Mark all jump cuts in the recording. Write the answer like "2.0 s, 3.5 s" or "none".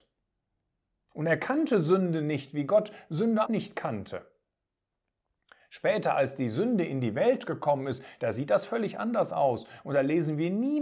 3.5 s